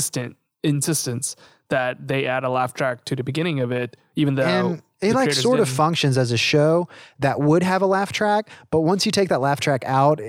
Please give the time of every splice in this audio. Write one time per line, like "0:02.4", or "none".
none

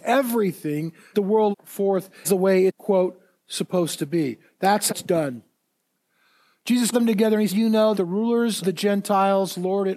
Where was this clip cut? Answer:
0:01.1
0:01.5
0:02.2
0:02.7
0:04.9
0:06.9
0:07.5
0:07.9
0:08.6

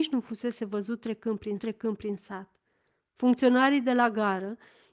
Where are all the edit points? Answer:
0:01.6

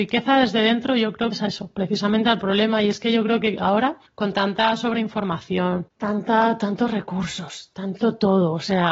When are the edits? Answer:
0:01.3
0:04.1

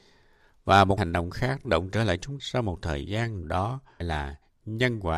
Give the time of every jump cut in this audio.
0:01.0
0:01.6
0:02.4
0:03.4
0:04.0

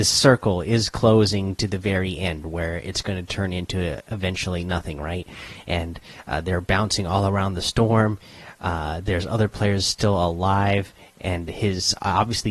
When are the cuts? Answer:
none

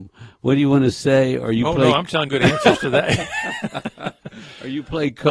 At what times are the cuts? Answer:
0:02.3

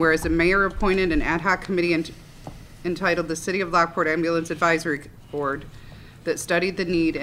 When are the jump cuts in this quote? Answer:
none

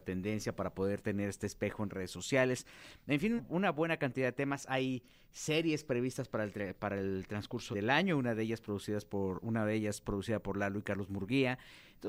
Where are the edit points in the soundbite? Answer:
0:03.4
0:07.7

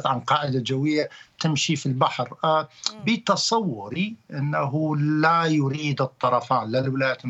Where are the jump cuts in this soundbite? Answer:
none

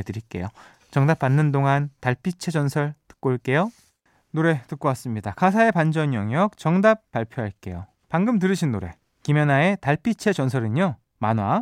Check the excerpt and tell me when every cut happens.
none

